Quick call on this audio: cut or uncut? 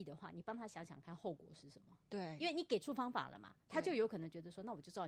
uncut